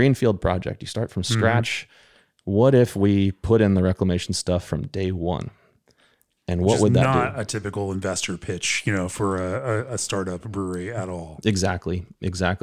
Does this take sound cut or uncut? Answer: uncut